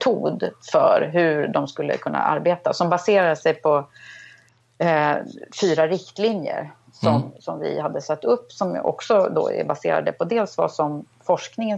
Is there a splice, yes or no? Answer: no